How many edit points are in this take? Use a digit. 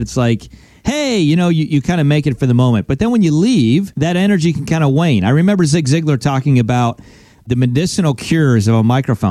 0